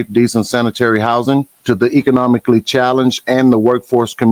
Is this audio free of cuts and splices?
no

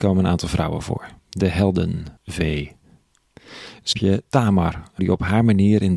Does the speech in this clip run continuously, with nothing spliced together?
no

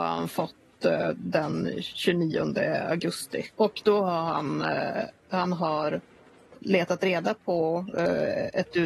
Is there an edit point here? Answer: yes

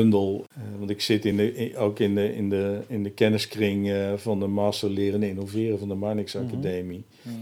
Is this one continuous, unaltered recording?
yes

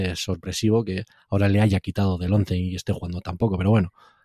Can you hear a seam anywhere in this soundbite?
no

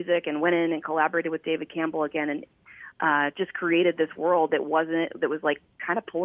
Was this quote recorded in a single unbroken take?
yes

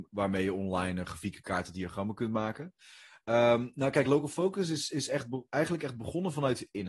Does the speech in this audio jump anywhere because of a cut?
no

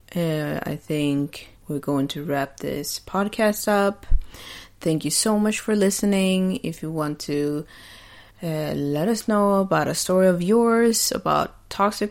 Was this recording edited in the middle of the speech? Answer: yes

